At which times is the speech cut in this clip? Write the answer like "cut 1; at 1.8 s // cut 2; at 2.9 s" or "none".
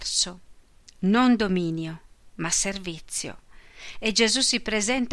none